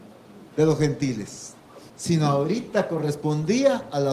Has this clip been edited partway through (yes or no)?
yes